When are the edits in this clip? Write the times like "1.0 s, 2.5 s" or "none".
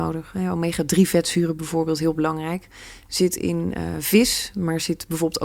none